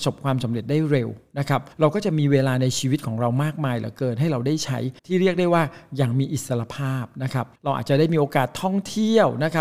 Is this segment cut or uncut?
cut